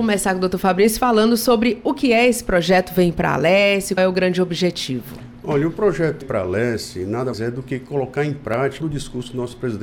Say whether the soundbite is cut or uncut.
cut